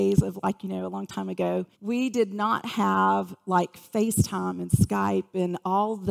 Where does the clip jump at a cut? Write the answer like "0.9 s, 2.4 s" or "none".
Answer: 1.7 s